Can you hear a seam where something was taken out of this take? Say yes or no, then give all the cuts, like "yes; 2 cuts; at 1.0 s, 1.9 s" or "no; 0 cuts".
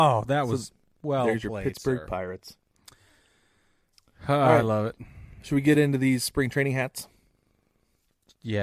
no; 0 cuts